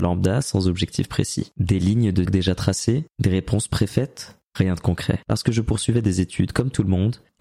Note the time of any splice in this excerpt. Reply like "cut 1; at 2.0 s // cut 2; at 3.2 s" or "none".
cut 1; at 2.3 s